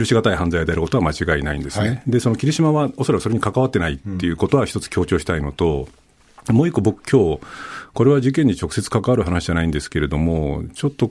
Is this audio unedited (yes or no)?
yes